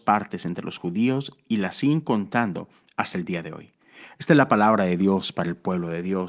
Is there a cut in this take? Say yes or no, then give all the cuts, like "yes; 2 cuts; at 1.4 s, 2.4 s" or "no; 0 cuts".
no; 0 cuts